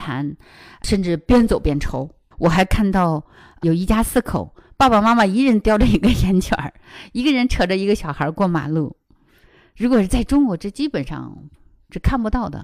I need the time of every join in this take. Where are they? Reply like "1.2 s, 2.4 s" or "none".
2.3 s

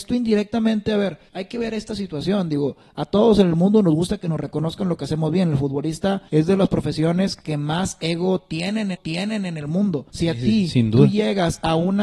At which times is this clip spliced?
1.3 s, 6.3 s, 8.9 s, 10.1 s

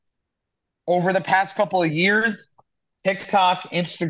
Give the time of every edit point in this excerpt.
none

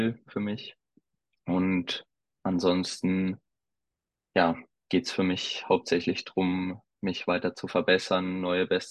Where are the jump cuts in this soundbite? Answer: none

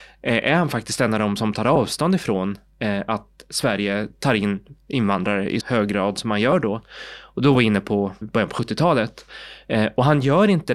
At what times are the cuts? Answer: 1.4 s, 5.6 s, 8.2 s

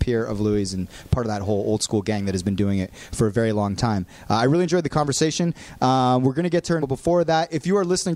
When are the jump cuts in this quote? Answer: 6.8 s

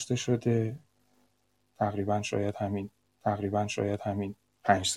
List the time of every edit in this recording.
3.1 s

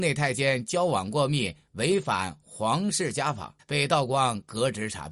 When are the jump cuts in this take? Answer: 3.6 s

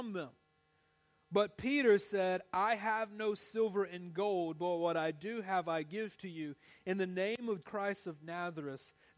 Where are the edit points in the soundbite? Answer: 7.6 s

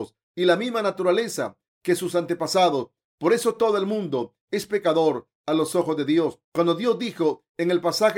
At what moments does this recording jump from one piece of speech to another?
6.4 s

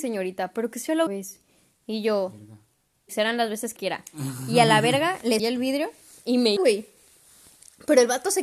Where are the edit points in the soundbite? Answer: 1.1 s, 3.1 s, 3.8 s, 5.4 s, 6.6 s

